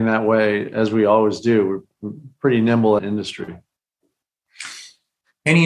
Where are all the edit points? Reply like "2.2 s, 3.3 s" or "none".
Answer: 3.0 s